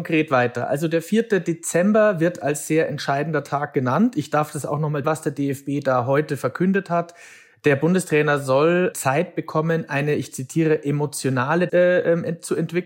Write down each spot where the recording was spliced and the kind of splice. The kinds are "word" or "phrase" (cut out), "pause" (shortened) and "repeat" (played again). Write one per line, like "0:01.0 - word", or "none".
0:05.0 - word
0:08.9 - word
0:11.7 - word